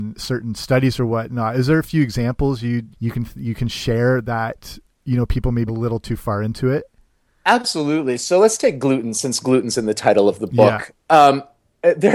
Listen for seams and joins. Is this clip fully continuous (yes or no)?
no